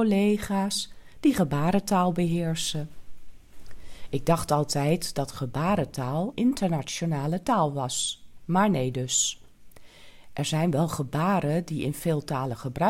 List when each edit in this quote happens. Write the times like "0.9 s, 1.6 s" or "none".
6.3 s